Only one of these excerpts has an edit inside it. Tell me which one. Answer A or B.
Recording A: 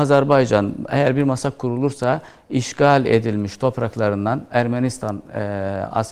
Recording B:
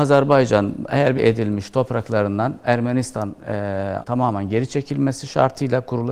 B